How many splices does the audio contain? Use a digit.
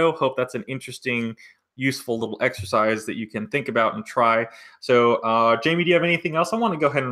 0